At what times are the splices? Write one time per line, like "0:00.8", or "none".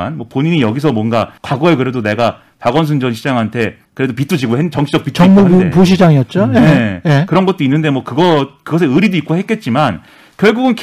0:01.4
0:03.8